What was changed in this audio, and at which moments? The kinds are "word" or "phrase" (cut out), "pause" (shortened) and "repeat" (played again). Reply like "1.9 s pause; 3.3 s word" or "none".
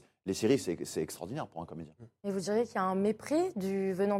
none